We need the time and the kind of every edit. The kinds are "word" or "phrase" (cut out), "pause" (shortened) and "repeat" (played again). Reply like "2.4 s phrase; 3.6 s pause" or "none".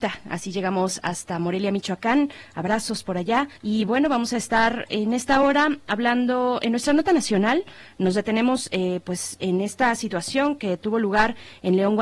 3.6 s pause